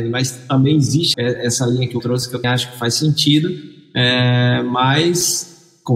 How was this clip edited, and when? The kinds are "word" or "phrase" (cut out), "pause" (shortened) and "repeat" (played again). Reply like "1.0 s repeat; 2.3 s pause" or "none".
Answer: 1.1 s word; 2.0 s word; 2.4 s word